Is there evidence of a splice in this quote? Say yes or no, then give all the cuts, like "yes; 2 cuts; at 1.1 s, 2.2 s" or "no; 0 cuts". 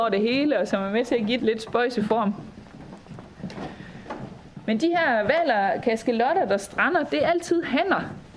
yes; 1 cut; at 1.4 s